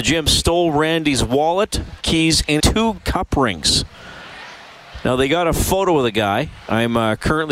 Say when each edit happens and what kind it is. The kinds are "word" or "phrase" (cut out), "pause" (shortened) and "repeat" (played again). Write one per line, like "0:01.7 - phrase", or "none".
0:02.0 - word
0:02.6 - word
0:03.0 - word